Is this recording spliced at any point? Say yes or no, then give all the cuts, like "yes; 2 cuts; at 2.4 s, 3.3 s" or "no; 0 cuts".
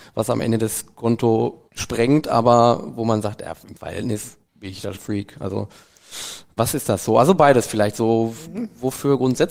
yes; 4 cuts; at 1.7 s, 4.4 s, 4.9 s, 6.6 s